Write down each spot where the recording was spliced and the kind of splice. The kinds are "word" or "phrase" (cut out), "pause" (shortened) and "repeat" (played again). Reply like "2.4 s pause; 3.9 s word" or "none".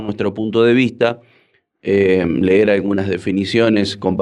none